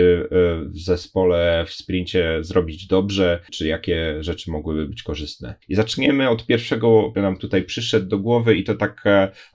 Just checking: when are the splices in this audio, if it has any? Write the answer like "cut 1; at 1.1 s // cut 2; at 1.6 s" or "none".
cut 1; at 3.5 s // cut 2; at 5.6 s // cut 3; at 7.1 s

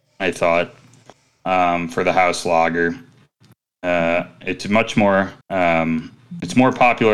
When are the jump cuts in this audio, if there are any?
cut 1; at 4.6 s // cut 2; at 5.4 s

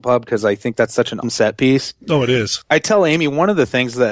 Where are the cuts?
cut 1; at 1.2 s

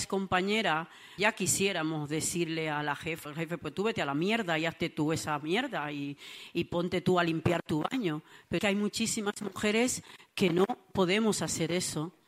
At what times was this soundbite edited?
cut 1; at 1.2 s // cut 2; at 3.2 s // cut 3; at 6.5 s // cut 4; at 8.6 s

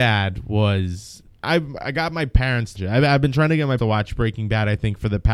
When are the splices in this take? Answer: cut 1; at 1.3 s // cut 2; at 2.7 s // cut 3; at 3.8 s

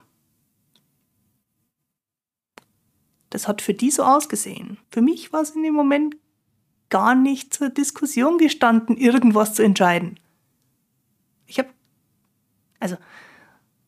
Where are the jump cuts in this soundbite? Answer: cut 1; at 4.8 s

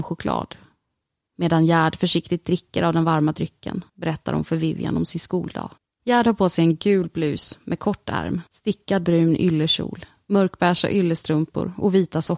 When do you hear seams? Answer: cut 1; at 3.9 s // cut 2; at 5.8 s // cut 3; at 8.5 s

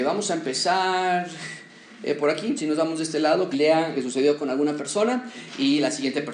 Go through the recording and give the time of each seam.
cut 1; at 2.6 s // cut 2; at 3.5 s // cut 3; at 3.9 s

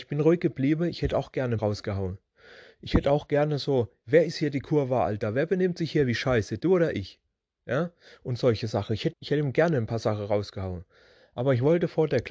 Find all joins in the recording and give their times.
cut 1; at 1.6 s // cut 2; at 9.1 s

